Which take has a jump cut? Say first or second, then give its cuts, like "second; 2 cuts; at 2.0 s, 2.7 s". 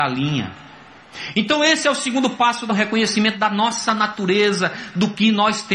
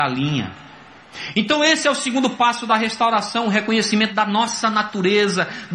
first; 1 cut; at 2.7 s